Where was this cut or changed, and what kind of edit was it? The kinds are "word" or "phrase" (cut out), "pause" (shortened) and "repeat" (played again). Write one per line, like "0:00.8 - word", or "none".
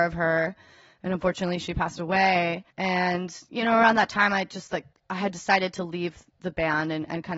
0:02.7 - pause
0:04.9 - pause